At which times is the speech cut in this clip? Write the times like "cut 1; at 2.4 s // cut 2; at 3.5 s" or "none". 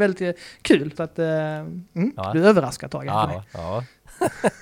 cut 1; at 0.9 s // cut 2; at 3.2 s